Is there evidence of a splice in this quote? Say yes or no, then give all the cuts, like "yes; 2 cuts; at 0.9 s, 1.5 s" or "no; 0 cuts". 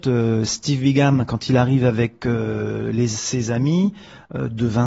no; 0 cuts